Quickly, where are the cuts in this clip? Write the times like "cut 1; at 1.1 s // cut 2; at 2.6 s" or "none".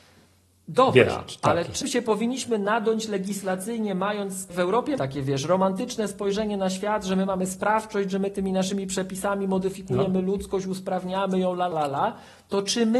cut 1; at 1.8 s // cut 2; at 4.5 s // cut 3; at 5.0 s // cut 4; at 11.7 s